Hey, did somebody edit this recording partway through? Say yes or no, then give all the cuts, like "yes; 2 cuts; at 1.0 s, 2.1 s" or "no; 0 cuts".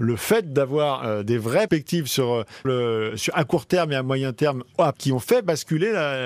yes; 3 cuts; at 1.7 s, 2.6 s, 4.9 s